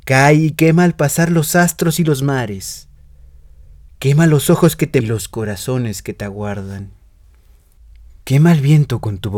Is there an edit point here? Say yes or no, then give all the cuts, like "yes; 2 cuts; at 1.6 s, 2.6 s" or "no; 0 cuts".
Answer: yes; 1 cut; at 5.0 s